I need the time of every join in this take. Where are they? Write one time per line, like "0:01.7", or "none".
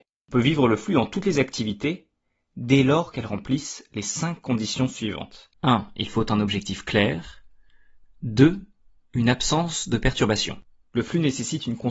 none